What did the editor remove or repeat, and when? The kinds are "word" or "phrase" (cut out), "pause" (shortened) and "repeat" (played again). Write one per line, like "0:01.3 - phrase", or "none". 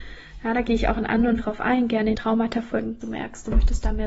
0:01.4 - word
0:02.1 - word
0:03.0 - word